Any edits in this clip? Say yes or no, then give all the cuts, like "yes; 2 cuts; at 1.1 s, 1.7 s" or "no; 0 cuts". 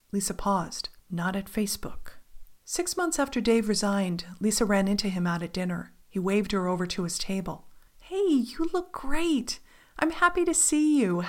yes; 4 cuts; at 1.0 s, 2.6 s, 6.0 s, 7.9 s